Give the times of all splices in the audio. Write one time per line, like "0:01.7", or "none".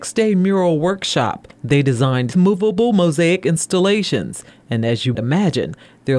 0:02.3
0:05.1